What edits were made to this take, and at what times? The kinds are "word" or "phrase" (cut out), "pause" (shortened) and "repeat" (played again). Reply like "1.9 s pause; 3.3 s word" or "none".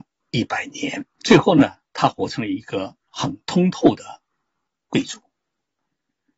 1.1 s pause